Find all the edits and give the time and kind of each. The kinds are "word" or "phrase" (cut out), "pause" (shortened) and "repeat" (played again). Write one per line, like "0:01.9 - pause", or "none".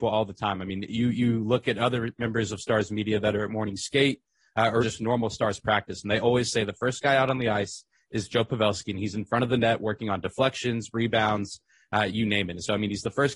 0:04.8 - word